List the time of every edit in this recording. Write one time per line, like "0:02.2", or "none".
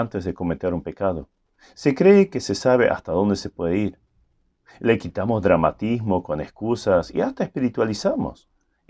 none